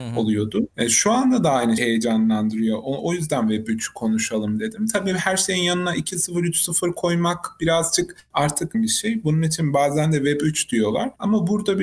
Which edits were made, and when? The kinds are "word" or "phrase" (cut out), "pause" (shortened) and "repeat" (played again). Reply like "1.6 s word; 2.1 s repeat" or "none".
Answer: 1.8 s word; 8.7 s phrase